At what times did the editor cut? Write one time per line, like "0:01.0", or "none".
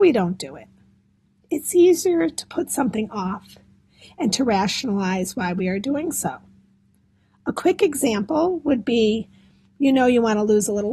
none